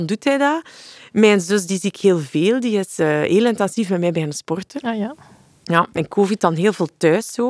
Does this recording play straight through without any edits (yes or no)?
yes